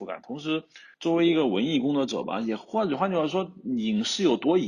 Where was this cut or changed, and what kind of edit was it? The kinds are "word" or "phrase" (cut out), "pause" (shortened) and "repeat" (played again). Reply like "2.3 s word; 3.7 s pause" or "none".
0.9 s pause

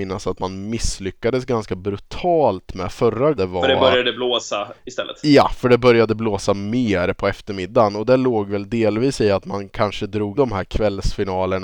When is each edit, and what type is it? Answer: 3.4 s word; 10.3 s word

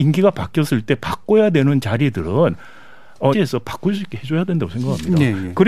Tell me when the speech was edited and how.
3.3 s phrase

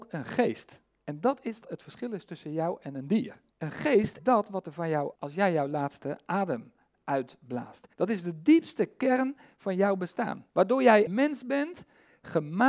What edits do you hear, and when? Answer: 1.6 s word; 3.5 s pause; 4.2 s word; 5.2 s word; 7.9 s pause; 10.5 s pause; 11.1 s word

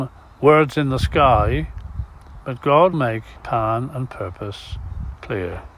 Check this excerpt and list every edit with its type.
2.9 s word; 3.4 s word

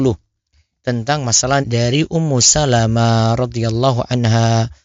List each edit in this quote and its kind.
1.6 s word

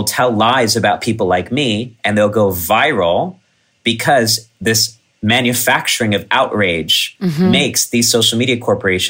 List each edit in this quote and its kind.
none

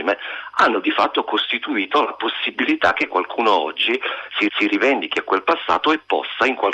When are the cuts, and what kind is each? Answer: 4.5 s repeat

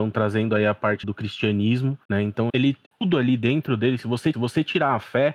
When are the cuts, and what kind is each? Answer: 1.0 s word; 2.0 s pause; 2.5 s word; 2.9 s pause; 4.3 s repeat

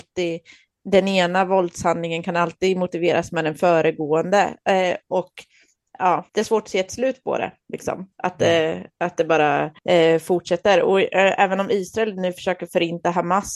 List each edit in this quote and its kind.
6.3 s pause; 8.1 s pause; 9.8 s pause

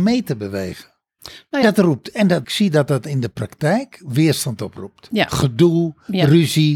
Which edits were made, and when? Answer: 1.6 s phrase; 2.4 s phrase

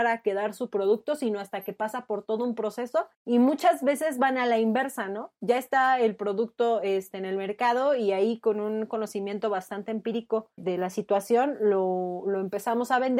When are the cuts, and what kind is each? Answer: 3.1 s pause; 10.6 s word

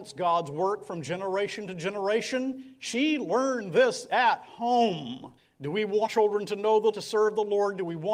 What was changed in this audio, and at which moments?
5.4 s pause; 6.1 s word; 6.9 s word

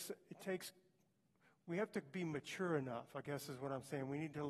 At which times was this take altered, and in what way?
none

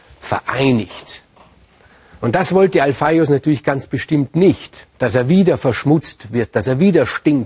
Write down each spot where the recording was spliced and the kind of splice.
4.9 s pause

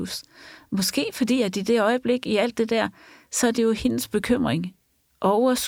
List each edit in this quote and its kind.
none

